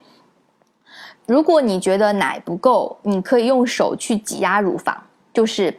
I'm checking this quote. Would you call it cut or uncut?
cut